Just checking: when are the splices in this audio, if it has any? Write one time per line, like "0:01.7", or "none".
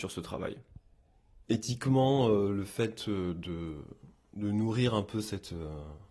none